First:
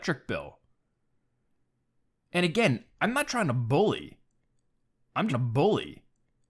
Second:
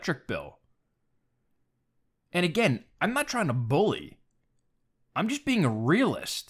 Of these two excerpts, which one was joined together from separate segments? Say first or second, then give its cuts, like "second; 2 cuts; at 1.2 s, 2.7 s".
first; 1 cut; at 5.3 s